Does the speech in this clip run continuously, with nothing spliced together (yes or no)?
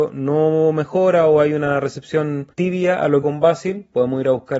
no